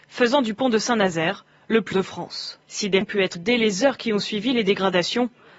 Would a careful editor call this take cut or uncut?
cut